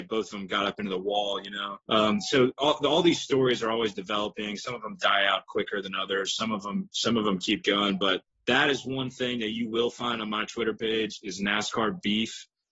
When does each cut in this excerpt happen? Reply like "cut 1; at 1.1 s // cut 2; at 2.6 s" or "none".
cut 1; at 1.8 s // cut 2; at 8.3 s